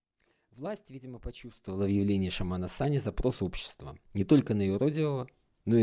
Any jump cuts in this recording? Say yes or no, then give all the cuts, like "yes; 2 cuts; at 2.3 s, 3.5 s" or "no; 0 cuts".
yes; 1 cut; at 4.0 s